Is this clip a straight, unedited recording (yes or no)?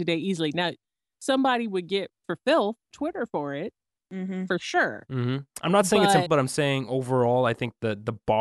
no